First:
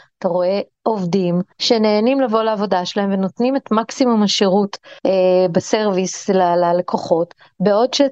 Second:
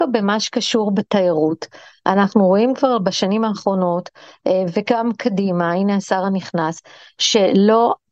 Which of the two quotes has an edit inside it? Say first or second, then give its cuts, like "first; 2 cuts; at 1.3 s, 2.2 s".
first; 2 cuts; at 1.5 s, 5.0 s